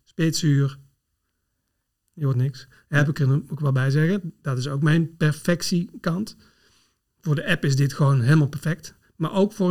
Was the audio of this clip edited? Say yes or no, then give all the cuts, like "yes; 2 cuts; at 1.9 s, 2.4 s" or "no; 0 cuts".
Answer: no; 0 cuts